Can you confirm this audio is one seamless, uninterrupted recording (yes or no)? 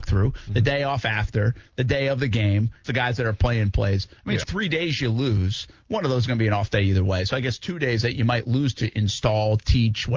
no